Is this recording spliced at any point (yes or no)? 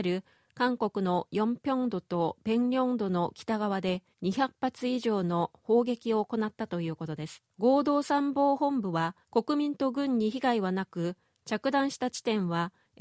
yes